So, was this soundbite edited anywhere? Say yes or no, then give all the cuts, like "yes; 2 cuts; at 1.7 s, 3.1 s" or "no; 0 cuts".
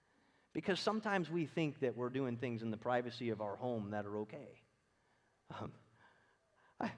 no; 0 cuts